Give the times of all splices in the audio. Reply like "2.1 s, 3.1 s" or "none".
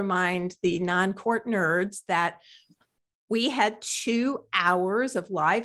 none